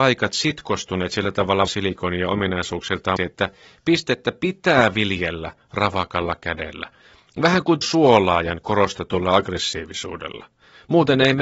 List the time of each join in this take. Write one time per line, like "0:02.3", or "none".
0:01.7
0:03.2
0:07.8